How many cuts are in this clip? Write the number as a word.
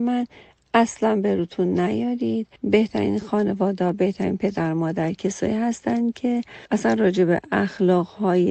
two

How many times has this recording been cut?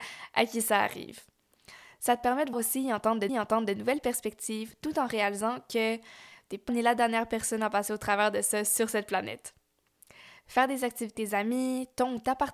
four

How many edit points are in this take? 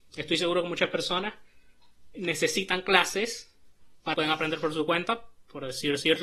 two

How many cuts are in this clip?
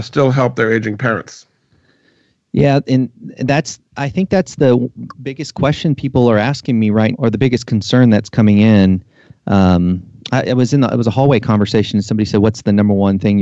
one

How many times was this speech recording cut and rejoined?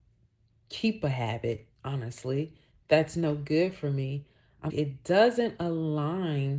two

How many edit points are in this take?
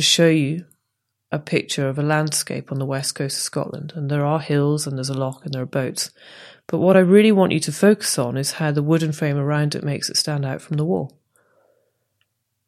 zero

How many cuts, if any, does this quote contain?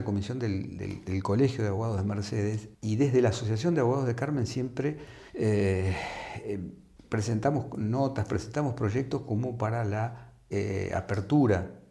three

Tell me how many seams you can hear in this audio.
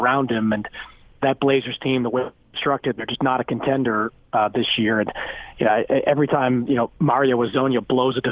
zero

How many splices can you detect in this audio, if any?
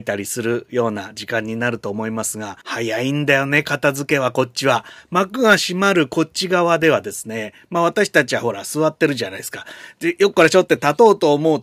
one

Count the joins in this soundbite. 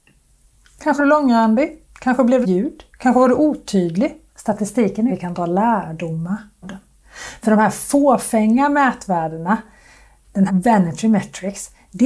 six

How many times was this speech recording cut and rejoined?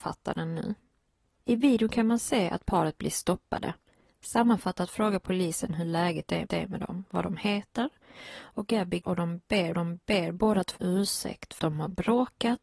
five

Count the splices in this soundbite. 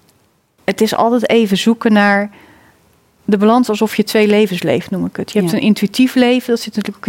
zero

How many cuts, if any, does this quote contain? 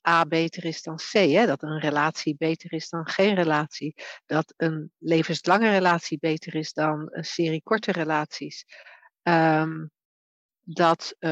zero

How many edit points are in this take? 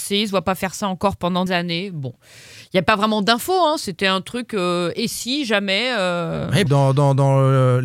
two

